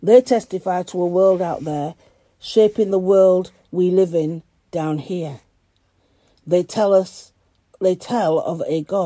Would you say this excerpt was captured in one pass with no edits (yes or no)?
yes